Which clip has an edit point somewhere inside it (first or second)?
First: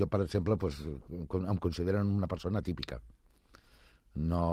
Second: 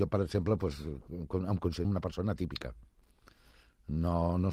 second